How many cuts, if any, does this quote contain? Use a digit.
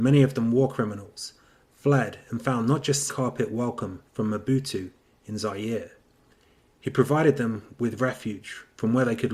1